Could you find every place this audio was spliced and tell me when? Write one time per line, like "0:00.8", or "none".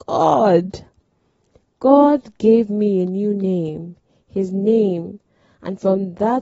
none

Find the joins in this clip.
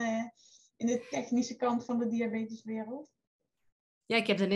none

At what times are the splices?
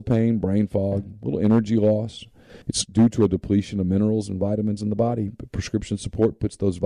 0:02.6

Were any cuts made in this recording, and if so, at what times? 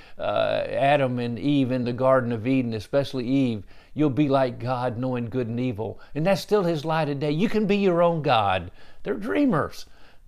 none

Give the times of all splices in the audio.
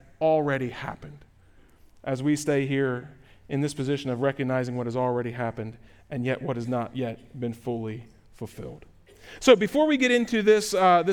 none

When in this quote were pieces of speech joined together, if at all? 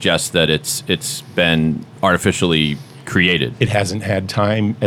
none

